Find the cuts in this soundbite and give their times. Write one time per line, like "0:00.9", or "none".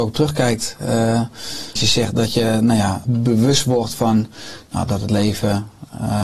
0:01.8
0:03.1